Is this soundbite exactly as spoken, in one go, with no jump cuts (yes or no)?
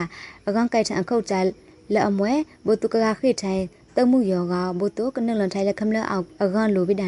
yes